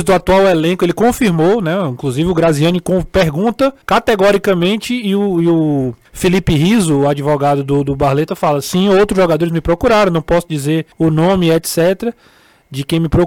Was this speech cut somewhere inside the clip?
yes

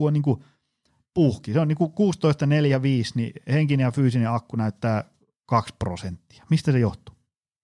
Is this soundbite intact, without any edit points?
yes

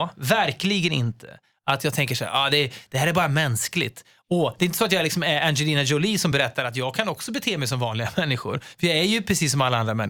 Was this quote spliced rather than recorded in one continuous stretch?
no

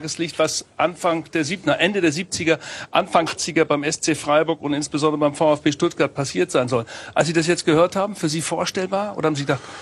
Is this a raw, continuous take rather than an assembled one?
no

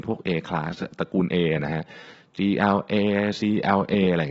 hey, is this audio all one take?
yes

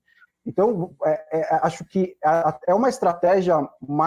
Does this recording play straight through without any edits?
yes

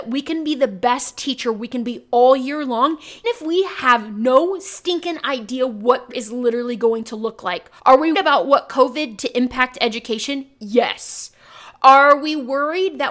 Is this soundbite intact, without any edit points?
no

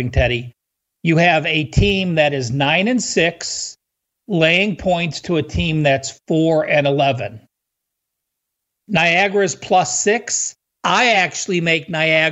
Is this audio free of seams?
yes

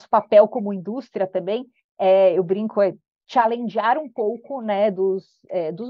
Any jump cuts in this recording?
no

